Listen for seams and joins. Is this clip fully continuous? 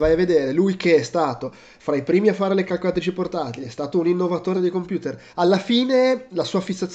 no; 2 cuts; at 4.5 s, 5.3 s

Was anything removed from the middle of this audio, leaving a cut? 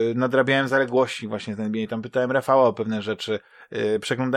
no; 0 cuts

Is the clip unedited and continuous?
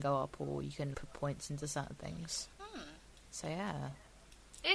no; 2 cuts; at 0.9 s, 2.5 s

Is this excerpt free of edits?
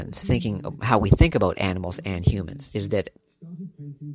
yes; 0 cuts

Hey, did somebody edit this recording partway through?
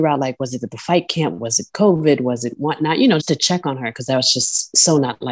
yes; 1 cut; at 3.2 s

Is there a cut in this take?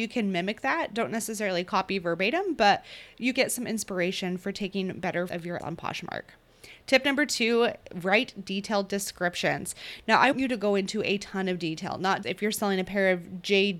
yes; 5 cuts; at 3.3 s, 5.3 s, 5.6 s, 10.3 s, 12.2 s

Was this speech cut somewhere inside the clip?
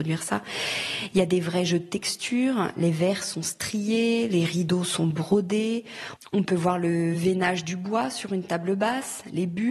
no; 0 cuts

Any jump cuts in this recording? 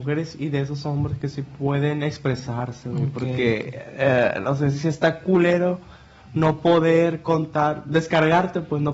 no; 0 cuts

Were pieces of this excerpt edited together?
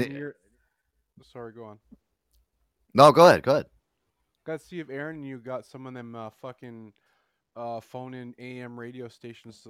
no; 0 cuts

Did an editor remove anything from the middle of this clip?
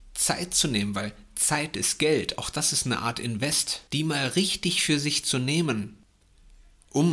yes; 1 cut; at 3.9 s

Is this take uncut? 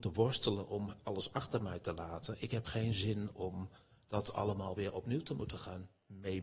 yes; 0 cuts

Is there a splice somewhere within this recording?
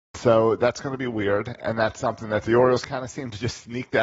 no; 0 cuts

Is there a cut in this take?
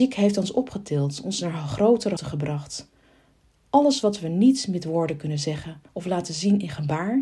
yes; 2 cuts; at 2.2 s, 5.9 s

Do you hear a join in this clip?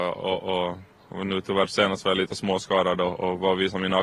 no; 0 cuts

